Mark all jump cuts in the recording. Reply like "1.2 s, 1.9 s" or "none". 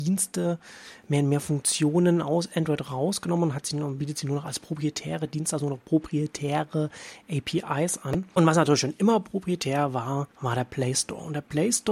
10.3 s